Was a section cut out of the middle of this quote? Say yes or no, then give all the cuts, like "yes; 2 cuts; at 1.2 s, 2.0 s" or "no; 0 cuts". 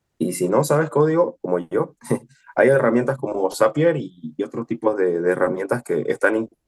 yes; 1 cut; at 1.4 s